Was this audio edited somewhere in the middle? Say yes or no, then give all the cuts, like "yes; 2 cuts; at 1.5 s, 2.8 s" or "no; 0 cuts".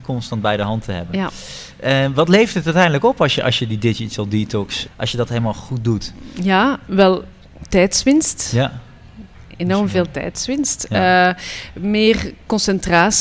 yes; 2 cuts; at 4.8 s, 6.9 s